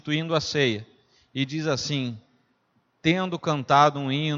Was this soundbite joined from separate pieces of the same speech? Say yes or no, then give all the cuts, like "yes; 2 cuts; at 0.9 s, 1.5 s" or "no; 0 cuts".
no; 0 cuts